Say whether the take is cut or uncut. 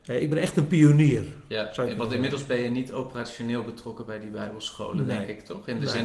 uncut